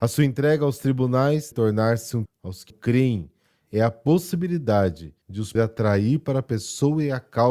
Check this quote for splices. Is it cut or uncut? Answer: cut